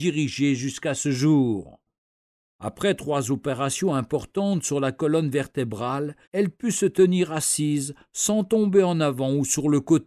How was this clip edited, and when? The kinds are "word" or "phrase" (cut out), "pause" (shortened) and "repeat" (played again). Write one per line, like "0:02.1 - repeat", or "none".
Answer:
0:06.2 - pause